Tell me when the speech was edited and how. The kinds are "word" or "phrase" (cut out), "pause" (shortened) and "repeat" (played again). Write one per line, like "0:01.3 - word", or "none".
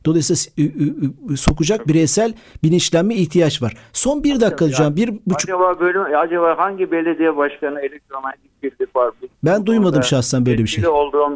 0:09.3 - pause